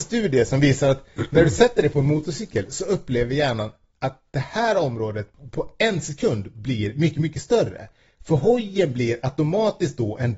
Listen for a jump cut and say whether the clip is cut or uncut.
uncut